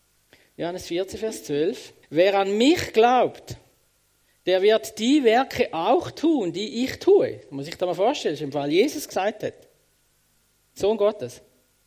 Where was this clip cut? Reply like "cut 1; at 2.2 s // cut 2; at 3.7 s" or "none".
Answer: cut 1; at 2.0 s // cut 2; at 9.1 s